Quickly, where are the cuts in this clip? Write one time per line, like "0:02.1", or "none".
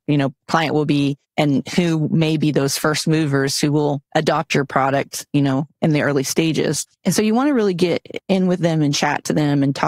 0:01.2
0:04.1
0:06.9
0:08.2